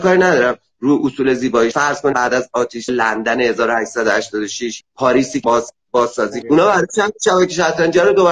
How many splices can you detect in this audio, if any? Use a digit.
6